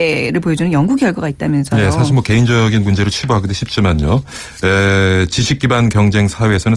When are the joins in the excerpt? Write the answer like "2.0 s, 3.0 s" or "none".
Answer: none